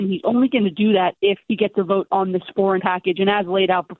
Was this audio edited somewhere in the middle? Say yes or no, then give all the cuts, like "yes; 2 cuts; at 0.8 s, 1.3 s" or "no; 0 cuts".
yes; 2 cuts; at 1.4 s, 2.8 s